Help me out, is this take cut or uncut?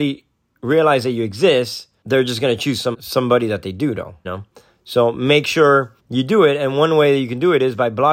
cut